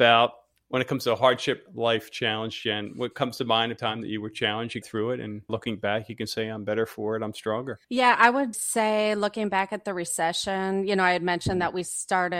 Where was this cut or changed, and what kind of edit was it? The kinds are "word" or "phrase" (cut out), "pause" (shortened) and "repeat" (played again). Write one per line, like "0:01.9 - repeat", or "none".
0:03.8 - word
0:04.8 - word
0:05.5 - word
0:07.8 - pause
0:08.5 - word